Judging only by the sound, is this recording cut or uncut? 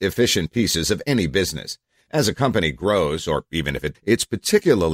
cut